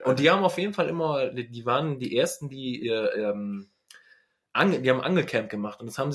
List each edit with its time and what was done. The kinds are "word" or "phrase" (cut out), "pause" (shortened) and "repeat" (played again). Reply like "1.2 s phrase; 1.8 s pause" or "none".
2.8 s word

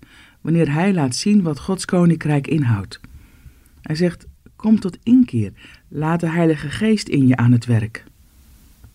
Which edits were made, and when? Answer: none

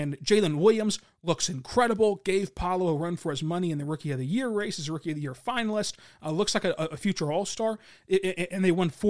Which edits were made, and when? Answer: none

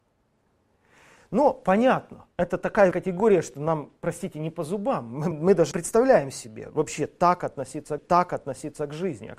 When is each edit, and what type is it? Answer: 2.9 s word; 4.0 s pause; 5.3 s word; 5.7 s word; 8.0 s repeat

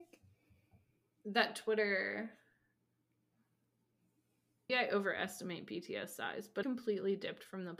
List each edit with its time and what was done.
4.7 s word; 6.6 s phrase

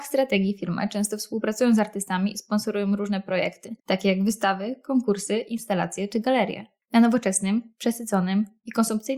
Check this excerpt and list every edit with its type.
3.8 s pause; 6.8 s pause

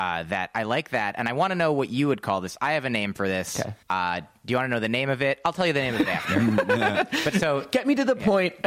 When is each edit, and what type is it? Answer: 3.8 s pause

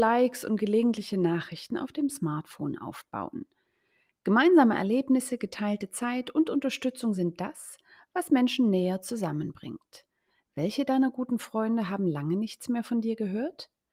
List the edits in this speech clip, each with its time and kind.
none

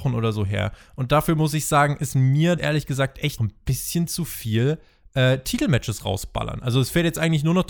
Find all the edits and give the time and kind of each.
2.6 s word; 3.4 s word

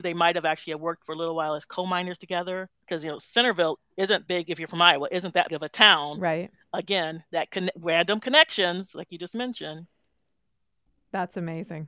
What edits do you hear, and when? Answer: 2.8 s pause; 4.3 s word; 5.5 s word

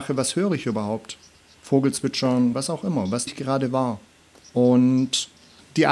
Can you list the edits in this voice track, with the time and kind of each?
2.5 s word; 3.3 s word

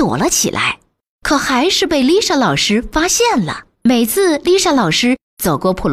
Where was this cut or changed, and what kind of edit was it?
3.7 s pause

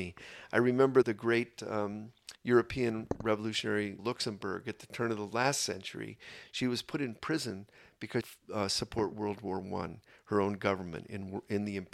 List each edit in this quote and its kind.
1.0 s word; 2.4 s pause; 4.0 s word; 8.2 s phrase

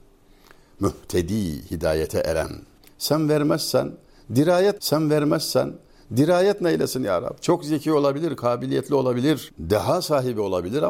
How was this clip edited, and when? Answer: 4.8 s repeat

